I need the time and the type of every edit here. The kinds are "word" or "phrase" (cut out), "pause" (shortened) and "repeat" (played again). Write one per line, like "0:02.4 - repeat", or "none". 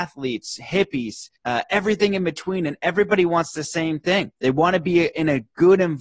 0:01.4 - pause